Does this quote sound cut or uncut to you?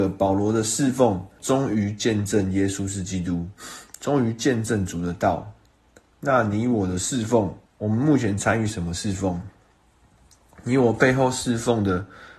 cut